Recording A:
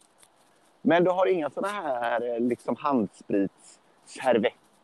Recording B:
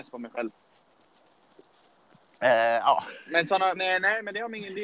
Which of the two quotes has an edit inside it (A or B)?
B